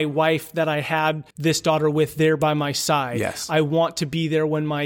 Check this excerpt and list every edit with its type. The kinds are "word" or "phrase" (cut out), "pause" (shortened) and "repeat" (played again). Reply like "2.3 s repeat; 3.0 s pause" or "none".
1.3 s pause

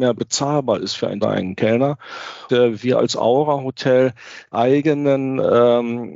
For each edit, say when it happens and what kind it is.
1.2 s phrase; 2.5 s word; 4.5 s word

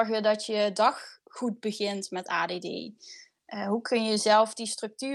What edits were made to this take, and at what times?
none

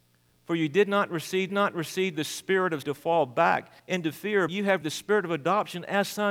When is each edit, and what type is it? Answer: 1.5 s repeat; 2.8 s word; 3.8 s pause; 4.5 s word; 4.8 s word

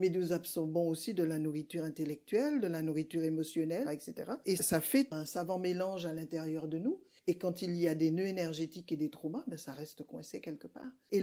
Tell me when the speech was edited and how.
3.8 s word; 4.6 s word

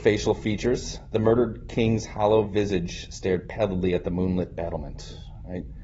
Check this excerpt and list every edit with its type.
none

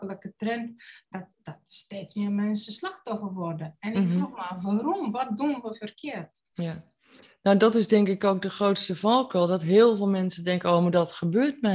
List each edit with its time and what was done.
1.3 s pause; 6.4 s pause

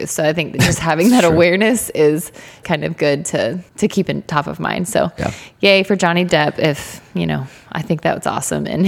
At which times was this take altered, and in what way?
2.6 s word; 3.7 s pause

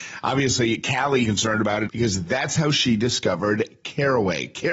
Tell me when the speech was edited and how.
1.2 s phrase; 1.9 s phrase

